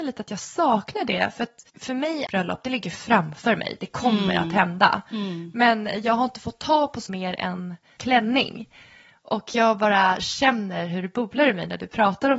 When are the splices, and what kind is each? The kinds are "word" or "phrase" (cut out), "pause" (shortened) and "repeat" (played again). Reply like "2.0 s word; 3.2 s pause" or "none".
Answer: 1.7 s pause; 2.3 s phrase; 7.1 s word; 8.0 s phrase